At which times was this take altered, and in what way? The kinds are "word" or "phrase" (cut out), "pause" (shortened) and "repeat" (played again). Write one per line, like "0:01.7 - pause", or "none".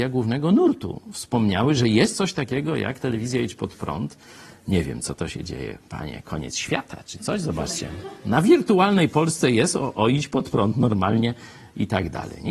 none